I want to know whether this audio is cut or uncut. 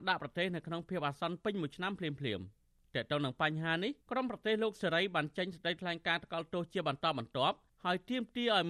cut